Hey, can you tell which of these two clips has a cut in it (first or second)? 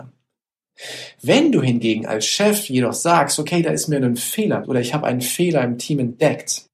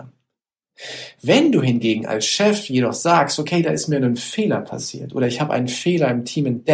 first